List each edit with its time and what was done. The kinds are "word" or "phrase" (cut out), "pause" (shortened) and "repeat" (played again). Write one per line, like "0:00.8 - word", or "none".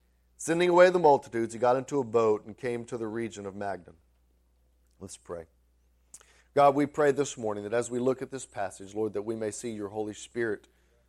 none